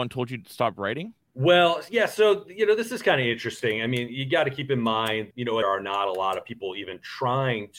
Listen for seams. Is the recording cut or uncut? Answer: cut